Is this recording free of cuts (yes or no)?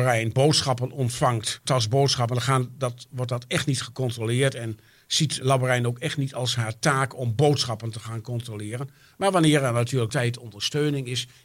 no